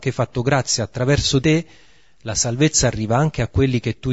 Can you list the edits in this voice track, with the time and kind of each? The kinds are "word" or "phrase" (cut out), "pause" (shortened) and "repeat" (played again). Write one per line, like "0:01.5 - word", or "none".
0:01.4 - word